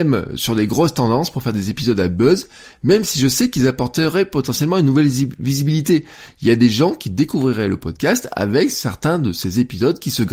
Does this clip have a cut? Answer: no; 0 cuts

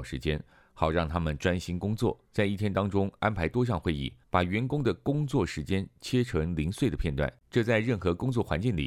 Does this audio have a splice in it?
yes; 3 cuts; at 2.2 s, 4.2 s, 7.4 s

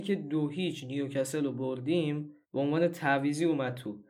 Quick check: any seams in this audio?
yes; 1 cut; at 2.4 s

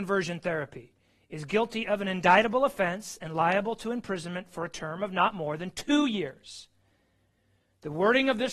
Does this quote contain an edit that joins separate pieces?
no; 0 cuts

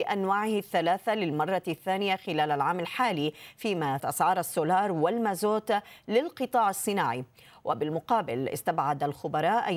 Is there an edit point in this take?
yes; 1 cut; at 4.0 s

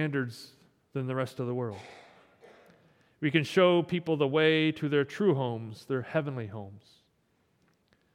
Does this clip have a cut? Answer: no; 0 cuts

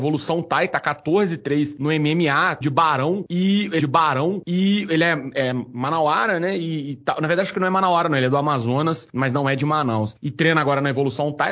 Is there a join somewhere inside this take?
yes; 2 cuts; at 2.6 s, 3.8 s

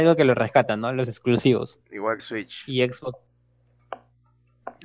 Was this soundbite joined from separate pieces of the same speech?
yes; 1 cut; at 2.2 s

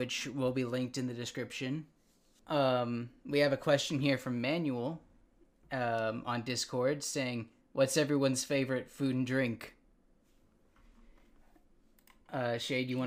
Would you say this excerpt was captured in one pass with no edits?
yes; 0 cuts

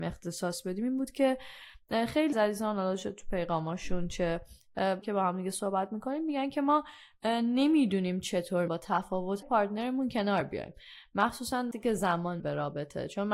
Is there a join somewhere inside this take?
yes; 6 cuts; at 2.3 s, 5.0 s, 8.7 s, 9.4 s, 11.7 s, 12.4 s

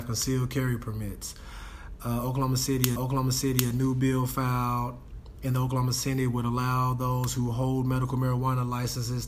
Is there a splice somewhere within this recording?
yes; 1 cut; at 3.0 s

